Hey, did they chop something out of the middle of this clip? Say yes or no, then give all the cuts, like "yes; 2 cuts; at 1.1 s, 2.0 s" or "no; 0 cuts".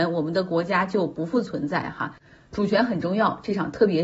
no; 0 cuts